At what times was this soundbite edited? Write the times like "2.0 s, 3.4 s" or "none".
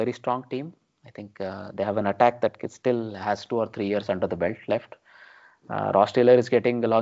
none